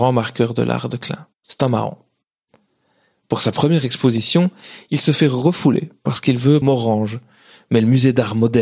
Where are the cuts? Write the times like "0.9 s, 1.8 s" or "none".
1.4 s, 6.6 s